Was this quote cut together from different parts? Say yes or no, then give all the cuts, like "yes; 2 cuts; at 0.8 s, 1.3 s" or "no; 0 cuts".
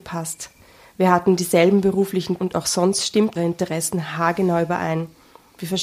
yes; 2 cuts; at 2.4 s, 3.4 s